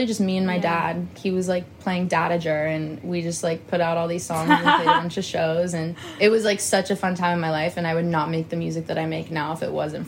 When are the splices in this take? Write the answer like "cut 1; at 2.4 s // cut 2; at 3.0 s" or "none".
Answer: none